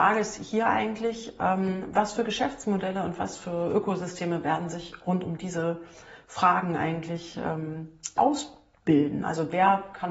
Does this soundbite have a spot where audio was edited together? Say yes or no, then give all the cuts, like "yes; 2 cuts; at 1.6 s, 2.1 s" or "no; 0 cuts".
yes; 1 cut; at 8.2 s